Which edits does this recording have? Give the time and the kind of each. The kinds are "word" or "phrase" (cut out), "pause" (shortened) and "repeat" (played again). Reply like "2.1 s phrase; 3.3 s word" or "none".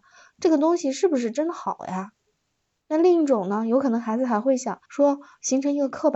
4.8 s pause